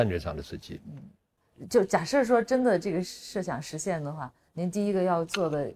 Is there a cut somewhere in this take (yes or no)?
no